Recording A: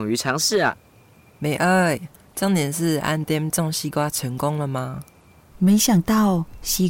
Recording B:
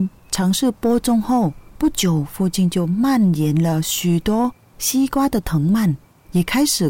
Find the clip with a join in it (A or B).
B